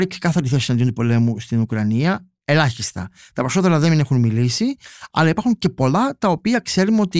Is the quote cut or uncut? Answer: uncut